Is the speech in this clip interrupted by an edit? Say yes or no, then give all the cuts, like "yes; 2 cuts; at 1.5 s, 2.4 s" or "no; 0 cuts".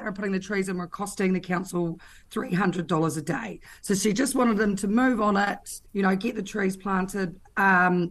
yes; 1 cut; at 5.9 s